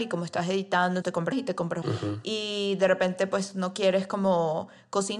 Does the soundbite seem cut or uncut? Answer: cut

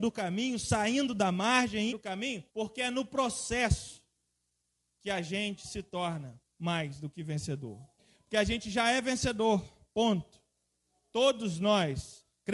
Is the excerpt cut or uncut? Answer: cut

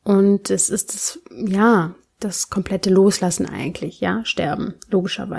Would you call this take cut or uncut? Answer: uncut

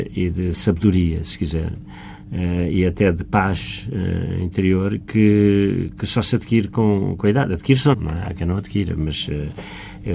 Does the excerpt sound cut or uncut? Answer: cut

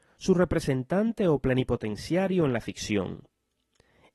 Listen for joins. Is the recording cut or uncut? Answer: uncut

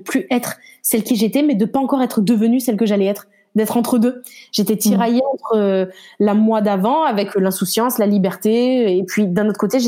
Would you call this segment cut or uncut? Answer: uncut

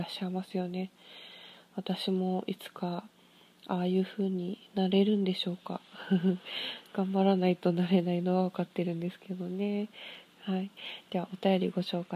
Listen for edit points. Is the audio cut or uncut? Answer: uncut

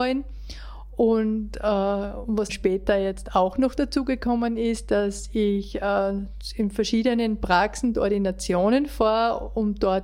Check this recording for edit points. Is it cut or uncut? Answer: cut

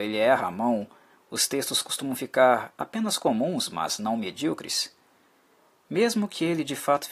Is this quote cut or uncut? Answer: uncut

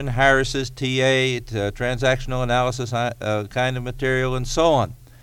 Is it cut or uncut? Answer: uncut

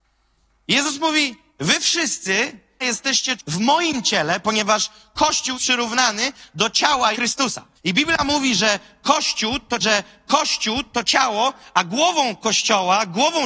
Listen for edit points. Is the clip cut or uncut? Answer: cut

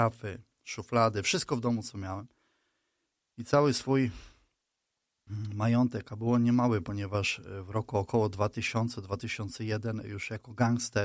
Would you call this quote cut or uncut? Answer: uncut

